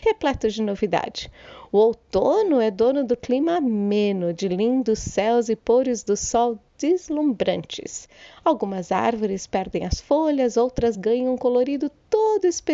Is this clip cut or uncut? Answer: uncut